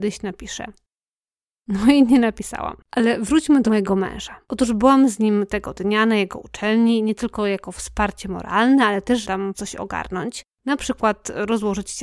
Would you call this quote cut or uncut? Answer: cut